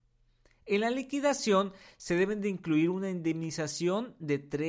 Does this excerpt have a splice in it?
no; 0 cuts

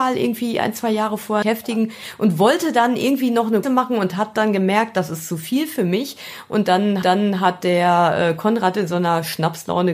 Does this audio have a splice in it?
yes; 3 cuts; at 1.4 s, 3.6 s, 7.0 s

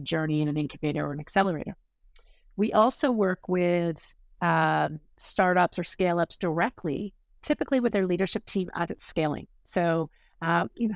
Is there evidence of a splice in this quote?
no; 0 cuts

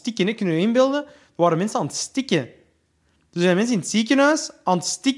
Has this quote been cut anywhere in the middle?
no; 0 cuts

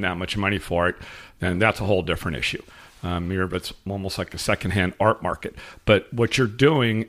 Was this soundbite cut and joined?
no; 0 cuts

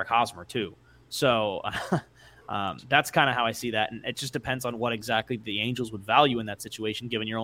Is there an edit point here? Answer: no; 0 cuts

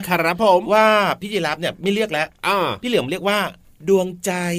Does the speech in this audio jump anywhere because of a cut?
no; 0 cuts

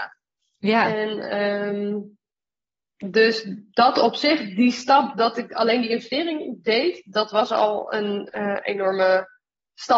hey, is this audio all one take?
yes; 0 cuts

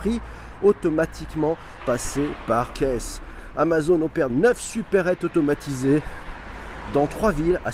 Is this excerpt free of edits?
no; 3 cuts; at 1.8 s, 2.7 s, 4.3 s

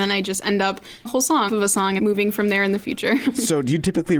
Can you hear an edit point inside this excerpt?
yes; 3 cuts; at 1.0 s, 1.5 s, 2.0 s

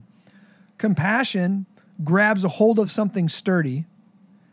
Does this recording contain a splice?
no; 0 cuts

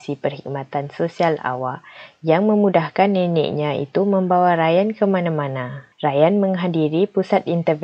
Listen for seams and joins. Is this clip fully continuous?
no; 1 cut; at 5.9 s

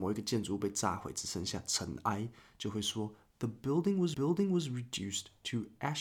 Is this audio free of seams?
no; 1 cut; at 4.1 s

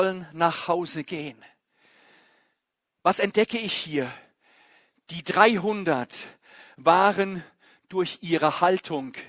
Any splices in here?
no; 0 cuts

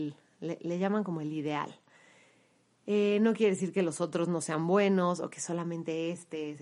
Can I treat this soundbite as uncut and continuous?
yes; 0 cuts

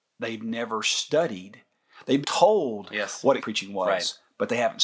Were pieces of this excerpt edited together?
yes; 2 cuts; at 2.2 s, 3.4 s

